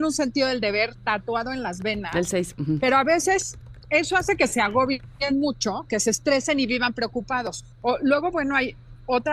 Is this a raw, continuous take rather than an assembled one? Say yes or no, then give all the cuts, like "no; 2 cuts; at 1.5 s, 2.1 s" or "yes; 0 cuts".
no; 1 cut; at 7.7 s